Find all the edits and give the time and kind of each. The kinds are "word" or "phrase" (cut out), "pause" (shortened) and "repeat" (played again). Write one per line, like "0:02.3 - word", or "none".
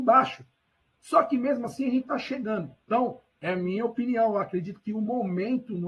0:02.8 - pause